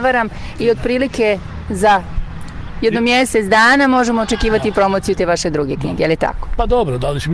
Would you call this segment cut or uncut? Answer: uncut